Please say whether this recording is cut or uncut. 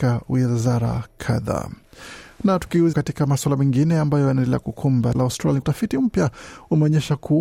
cut